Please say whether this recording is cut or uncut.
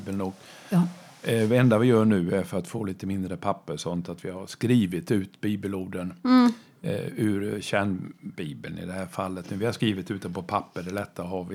uncut